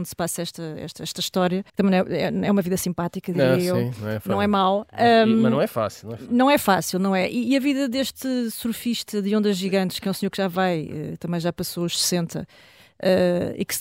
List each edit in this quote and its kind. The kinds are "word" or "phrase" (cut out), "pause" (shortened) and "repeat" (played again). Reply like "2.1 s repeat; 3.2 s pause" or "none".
1.7 s pause